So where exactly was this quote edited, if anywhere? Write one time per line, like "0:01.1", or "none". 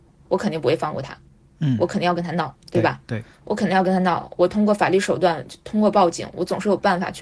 0:01.4